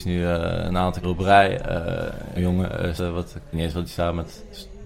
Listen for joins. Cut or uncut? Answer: cut